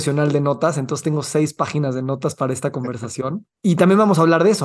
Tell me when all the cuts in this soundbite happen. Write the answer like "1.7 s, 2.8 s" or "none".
none